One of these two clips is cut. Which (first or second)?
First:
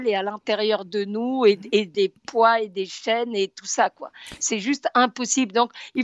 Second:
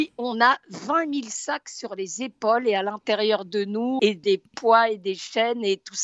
second